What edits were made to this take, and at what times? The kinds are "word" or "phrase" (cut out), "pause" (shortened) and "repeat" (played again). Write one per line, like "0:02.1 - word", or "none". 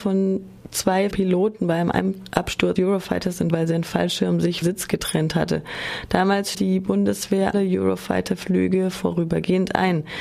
0:01.1 - word
0:02.8 - word
0:03.5 - word
0:04.6 - word
0:06.5 - word
0:07.5 - word